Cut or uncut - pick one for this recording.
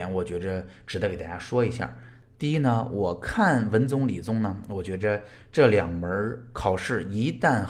uncut